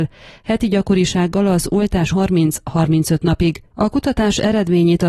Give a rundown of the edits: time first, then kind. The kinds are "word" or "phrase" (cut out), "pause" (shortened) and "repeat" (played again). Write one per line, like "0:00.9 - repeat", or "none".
0:02.1 - word